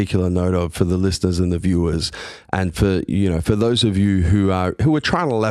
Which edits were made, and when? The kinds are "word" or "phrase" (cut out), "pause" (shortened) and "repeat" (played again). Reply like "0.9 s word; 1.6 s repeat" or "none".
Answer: none